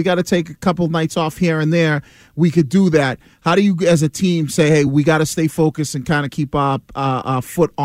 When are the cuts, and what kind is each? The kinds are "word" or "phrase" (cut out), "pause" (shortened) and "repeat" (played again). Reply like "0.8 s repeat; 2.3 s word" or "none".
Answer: none